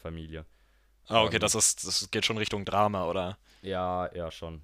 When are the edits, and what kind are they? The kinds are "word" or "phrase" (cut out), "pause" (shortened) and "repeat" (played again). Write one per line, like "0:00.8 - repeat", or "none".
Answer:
none